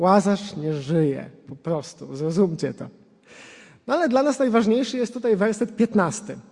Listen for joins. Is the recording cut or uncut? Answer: uncut